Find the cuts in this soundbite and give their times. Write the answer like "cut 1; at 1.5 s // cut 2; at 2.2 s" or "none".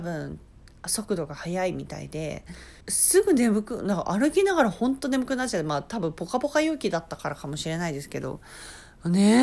cut 1; at 2.8 s